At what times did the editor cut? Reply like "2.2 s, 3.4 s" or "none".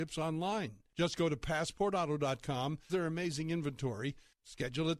2.9 s